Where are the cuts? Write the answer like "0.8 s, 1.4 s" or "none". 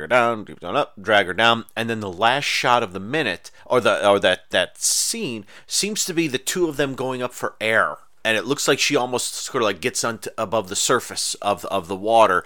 3.6 s